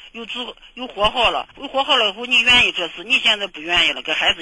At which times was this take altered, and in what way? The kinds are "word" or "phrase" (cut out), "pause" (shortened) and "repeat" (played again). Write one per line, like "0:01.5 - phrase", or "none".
0:01.5 - pause